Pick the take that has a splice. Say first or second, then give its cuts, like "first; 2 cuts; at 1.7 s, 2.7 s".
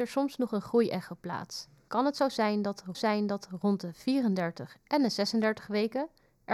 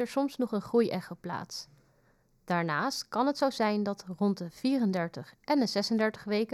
first; 2 cuts; at 1.9 s, 2.9 s